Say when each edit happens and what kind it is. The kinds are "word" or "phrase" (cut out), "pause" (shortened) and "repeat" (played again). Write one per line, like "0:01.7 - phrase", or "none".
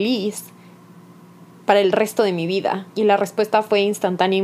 0:02.9 - pause

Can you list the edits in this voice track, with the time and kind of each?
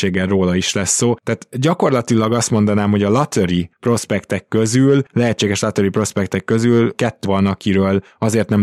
0:07.2 - word

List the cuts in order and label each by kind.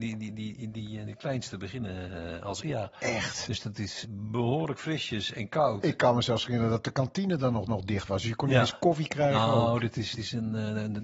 0:01.0 - word
0:02.6 - word
0:04.0 - word
0:07.7 - repeat
0:10.1 - word

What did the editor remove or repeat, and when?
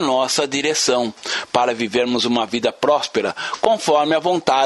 none

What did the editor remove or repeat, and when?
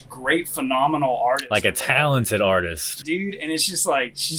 0:03.0 - word

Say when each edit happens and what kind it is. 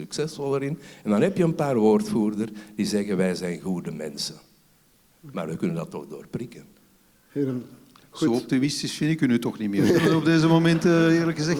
none

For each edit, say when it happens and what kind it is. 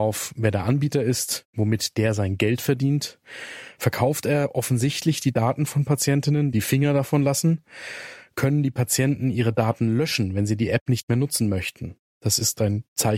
0:06.5 - phrase

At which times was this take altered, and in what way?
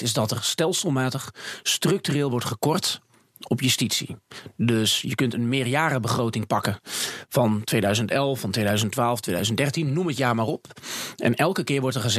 none

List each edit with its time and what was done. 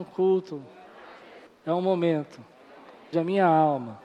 0:01.5 - pause
0:03.1 - word

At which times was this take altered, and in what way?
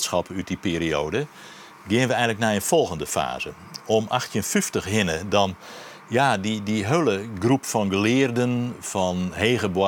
none

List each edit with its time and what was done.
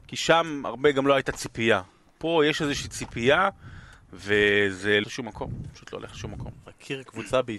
0:05.0 - phrase

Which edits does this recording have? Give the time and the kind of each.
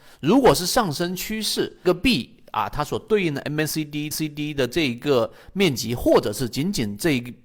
0:01.8 - phrase
0:04.1 - repeat

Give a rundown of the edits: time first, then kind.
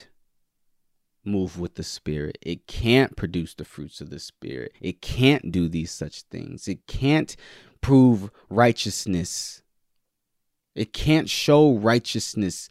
0:04.8 - pause

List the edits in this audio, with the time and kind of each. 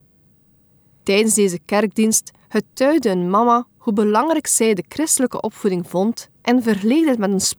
0:03.7 - pause
0:06.3 - pause

